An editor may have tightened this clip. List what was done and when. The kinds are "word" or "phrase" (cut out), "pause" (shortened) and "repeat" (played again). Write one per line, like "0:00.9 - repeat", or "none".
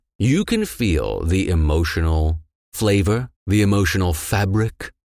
0:03.3 - pause